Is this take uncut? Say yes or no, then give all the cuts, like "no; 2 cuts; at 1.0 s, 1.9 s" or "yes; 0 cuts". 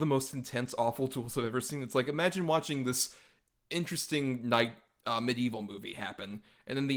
yes; 0 cuts